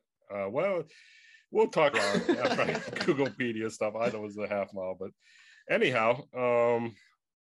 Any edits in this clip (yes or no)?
yes